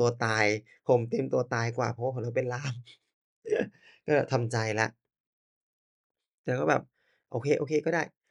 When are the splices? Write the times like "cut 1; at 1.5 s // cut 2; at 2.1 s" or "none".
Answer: none

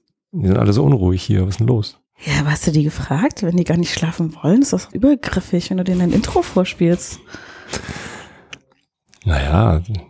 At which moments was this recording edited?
cut 1; at 4.9 s

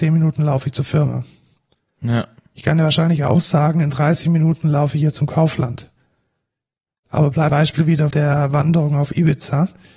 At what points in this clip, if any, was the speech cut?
cut 1; at 7.5 s // cut 2; at 8.1 s

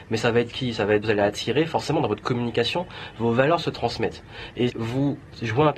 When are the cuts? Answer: cut 1; at 1.0 s // cut 2; at 4.7 s

